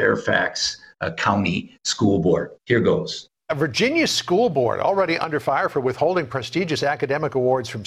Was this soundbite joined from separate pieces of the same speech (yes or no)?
yes